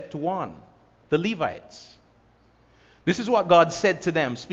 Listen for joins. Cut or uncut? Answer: uncut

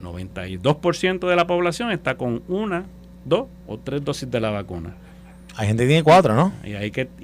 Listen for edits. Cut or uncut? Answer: uncut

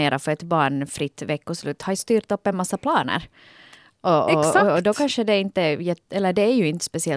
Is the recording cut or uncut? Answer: uncut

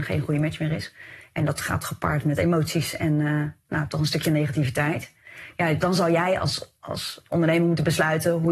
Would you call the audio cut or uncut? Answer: uncut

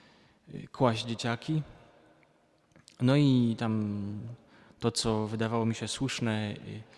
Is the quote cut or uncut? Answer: uncut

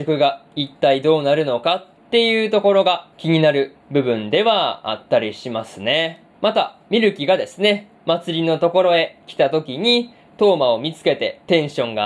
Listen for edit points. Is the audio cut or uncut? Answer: cut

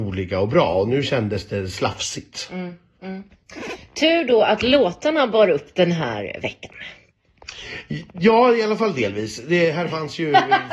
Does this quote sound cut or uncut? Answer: uncut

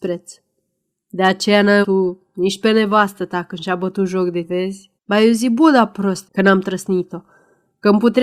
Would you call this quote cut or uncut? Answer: cut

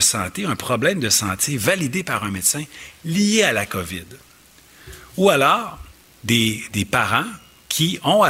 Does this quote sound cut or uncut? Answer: cut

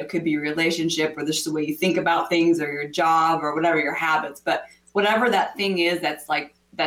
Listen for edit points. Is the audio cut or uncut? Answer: uncut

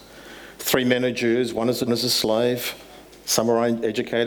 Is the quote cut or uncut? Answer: cut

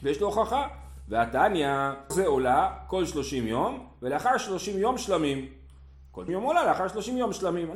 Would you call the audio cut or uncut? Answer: cut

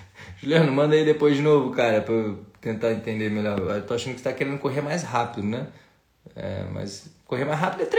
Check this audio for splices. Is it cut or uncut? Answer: uncut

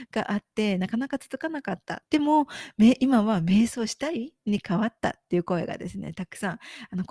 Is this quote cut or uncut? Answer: cut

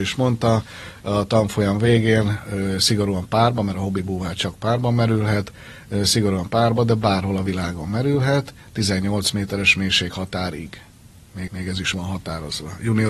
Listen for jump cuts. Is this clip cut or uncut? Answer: cut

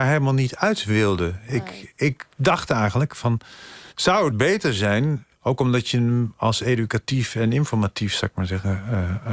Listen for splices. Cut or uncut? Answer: cut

